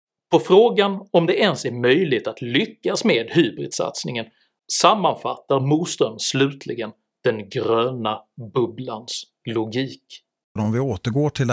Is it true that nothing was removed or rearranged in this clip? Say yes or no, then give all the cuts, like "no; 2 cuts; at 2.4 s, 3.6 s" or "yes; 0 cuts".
yes; 0 cuts